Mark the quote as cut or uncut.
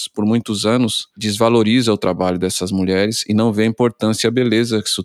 uncut